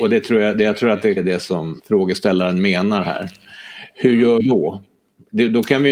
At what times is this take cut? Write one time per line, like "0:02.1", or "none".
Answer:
0:01.2
0:01.8
0:04.4